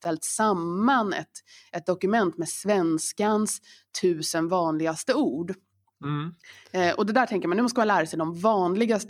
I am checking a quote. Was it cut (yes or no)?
no